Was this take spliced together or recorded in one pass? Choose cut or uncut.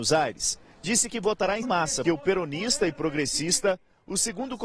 cut